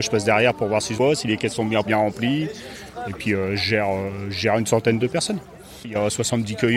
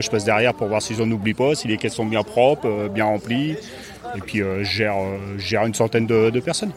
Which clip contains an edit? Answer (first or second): first